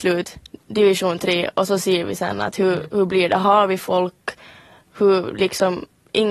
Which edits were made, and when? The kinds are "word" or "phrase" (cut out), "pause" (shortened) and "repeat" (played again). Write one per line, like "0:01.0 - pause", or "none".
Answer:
none